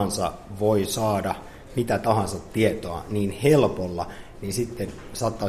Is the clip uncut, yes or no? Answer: yes